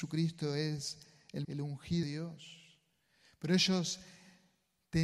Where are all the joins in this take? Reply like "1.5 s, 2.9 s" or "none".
1.4 s, 2.0 s